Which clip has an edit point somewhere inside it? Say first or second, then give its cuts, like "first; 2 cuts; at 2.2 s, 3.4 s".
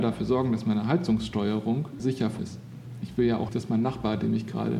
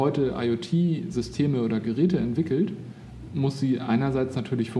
first; 3 cuts; at 2.0 s, 2.4 s, 3.5 s